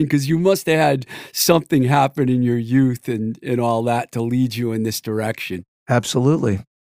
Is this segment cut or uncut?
cut